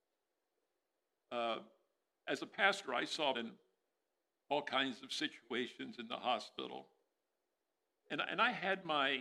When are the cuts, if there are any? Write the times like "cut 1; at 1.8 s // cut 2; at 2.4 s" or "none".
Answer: cut 1; at 3.3 s